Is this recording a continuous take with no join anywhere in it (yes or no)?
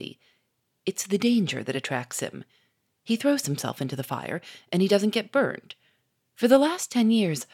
yes